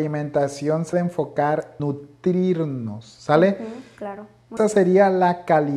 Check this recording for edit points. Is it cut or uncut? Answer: cut